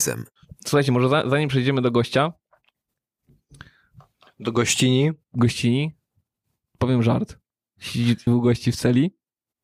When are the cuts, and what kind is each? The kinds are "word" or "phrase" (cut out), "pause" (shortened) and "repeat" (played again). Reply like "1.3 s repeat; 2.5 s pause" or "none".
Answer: 8.3 s word